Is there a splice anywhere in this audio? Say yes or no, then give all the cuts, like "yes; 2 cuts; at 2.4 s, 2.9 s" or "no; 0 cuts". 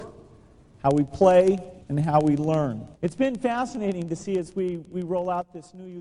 yes; 2 cuts; at 1.8 s, 2.9 s